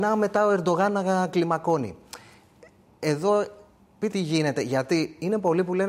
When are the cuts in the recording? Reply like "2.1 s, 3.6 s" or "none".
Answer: 4.1 s